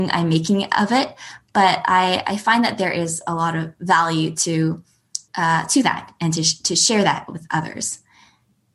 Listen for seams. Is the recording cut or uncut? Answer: cut